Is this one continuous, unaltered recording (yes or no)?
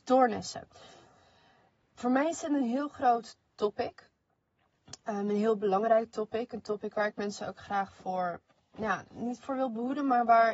yes